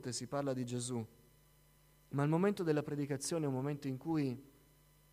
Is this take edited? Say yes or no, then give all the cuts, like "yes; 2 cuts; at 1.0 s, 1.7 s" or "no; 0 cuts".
no; 0 cuts